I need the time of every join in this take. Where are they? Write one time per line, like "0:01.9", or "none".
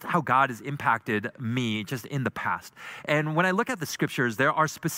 none